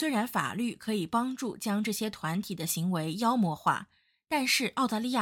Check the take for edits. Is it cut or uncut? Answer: uncut